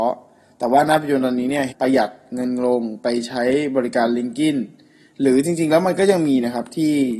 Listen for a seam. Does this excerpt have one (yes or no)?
yes